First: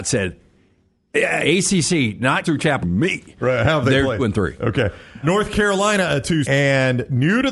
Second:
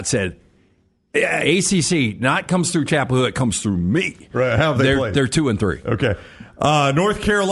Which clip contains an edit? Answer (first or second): first